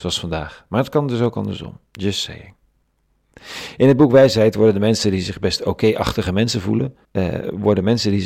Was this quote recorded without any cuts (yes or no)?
no